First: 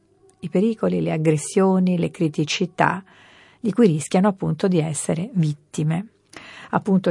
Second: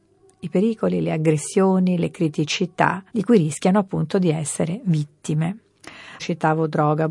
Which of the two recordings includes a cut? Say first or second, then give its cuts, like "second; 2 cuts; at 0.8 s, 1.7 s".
second; 2 cuts; at 3.1 s, 6.2 s